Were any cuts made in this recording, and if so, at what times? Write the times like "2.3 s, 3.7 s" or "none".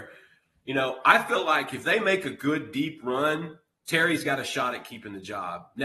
none